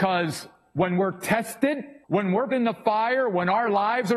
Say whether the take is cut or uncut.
cut